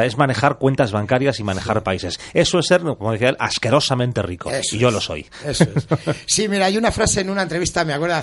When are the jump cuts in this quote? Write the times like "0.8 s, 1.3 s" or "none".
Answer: none